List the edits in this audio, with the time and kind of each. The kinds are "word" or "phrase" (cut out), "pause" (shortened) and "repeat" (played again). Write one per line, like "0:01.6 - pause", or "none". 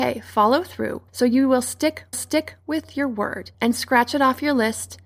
0:01.1 - pause
0:02.1 - repeat
0:03.5 - pause

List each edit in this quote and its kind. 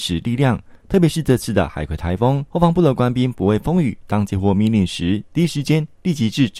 0:02.5 - pause

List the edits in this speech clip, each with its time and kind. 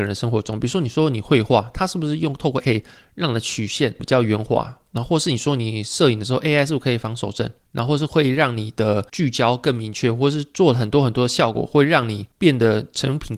0:02.6 - word

